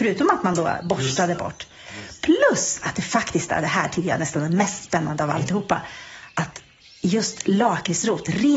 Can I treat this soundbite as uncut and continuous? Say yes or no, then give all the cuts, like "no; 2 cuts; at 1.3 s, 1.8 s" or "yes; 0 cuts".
yes; 0 cuts